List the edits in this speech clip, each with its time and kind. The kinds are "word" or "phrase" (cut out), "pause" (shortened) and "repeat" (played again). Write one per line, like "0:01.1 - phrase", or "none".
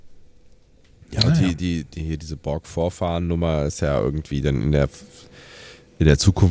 none